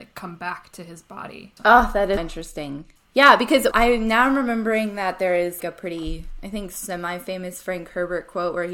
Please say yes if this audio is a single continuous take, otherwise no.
no